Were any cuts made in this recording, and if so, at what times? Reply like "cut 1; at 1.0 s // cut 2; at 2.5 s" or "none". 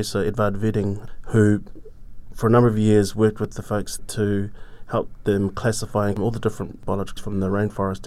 cut 1; at 4.0 s // cut 2; at 6.2 s // cut 3; at 7.2 s